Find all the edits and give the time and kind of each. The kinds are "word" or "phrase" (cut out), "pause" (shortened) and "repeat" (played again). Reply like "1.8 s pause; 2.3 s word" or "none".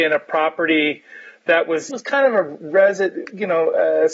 1.9 s word